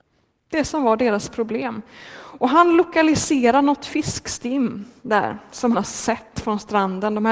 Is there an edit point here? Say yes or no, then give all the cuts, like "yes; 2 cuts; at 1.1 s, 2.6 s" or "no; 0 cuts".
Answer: yes; 1 cut; at 5.7 s